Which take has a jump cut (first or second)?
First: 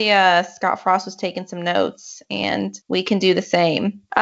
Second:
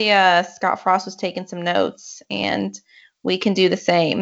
first